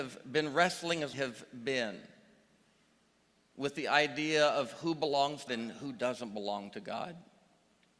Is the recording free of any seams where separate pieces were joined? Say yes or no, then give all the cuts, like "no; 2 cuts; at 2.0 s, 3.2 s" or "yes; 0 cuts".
no; 2 cuts; at 1.1 s, 5.5 s